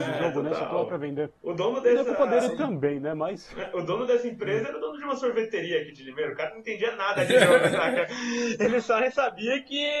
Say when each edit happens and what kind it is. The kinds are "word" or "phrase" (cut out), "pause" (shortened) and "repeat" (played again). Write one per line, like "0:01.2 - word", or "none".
0:01.4 - pause